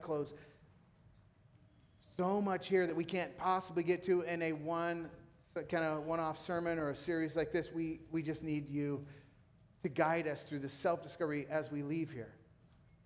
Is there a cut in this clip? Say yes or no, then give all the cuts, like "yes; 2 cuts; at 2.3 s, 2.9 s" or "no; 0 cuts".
no; 0 cuts